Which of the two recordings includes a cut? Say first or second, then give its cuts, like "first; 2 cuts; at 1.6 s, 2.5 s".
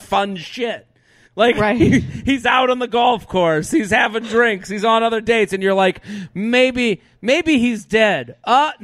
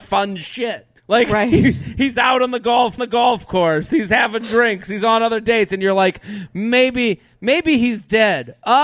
second; 2 cuts; at 1.0 s, 3.0 s